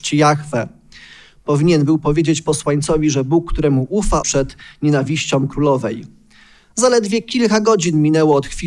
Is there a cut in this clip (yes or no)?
yes